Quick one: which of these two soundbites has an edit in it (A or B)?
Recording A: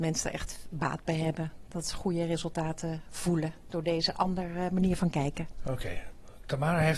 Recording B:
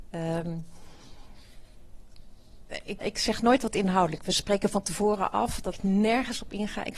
B